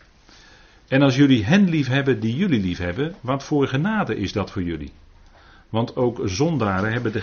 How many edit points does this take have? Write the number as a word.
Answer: zero